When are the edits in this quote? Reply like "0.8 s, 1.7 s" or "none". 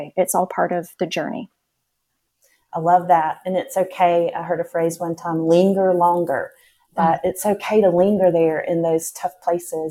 none